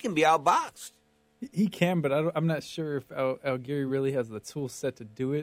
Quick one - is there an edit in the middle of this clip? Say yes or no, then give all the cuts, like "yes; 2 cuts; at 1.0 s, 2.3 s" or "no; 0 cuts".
no; 0 cuts